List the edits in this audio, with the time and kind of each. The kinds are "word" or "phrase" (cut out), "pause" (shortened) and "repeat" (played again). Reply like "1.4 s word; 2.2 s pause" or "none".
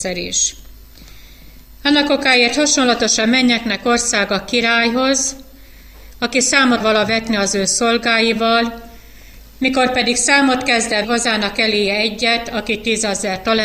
6.8 s word; 11.0 s word

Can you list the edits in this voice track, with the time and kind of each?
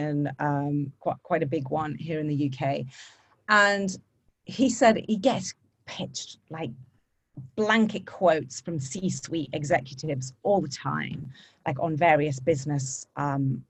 none

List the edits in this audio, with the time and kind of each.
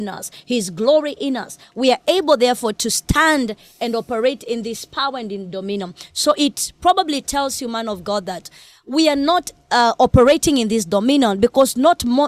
none

